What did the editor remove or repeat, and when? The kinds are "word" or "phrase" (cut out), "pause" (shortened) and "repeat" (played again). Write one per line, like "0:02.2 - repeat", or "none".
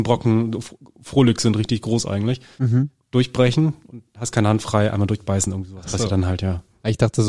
none